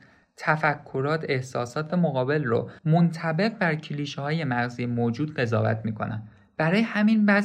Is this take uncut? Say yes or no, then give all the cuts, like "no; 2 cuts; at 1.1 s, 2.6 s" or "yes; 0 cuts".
no; 2 cuts; at 1.9 s, 2.8 s